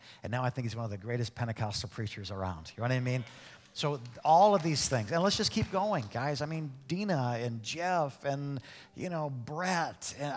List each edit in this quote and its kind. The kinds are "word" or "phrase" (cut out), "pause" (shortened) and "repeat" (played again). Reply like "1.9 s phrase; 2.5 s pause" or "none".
none